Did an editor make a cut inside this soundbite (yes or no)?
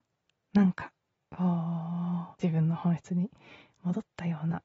yes